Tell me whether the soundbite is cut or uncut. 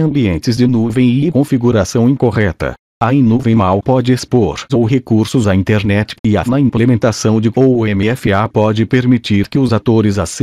cut